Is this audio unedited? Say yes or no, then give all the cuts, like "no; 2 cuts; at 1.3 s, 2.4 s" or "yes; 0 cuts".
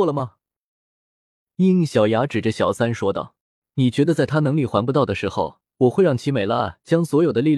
no; 2 cuts; at 3.4 s, 5.7 s